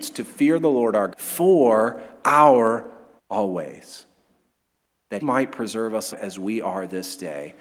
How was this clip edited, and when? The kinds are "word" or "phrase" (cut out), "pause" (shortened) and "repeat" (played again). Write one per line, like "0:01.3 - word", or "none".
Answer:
0:01.1 - word
0:03.2 - word
0:05.2 - word
0:06.1 - word